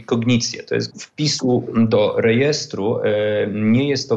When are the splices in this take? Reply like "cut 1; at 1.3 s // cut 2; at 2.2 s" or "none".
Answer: cut 1; at 0.9 s